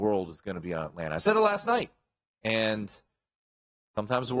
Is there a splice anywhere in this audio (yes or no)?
no